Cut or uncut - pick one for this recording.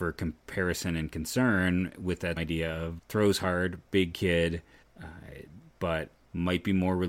cut